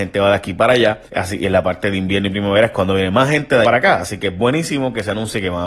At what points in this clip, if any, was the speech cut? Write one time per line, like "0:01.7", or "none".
0:01.1
0:03.6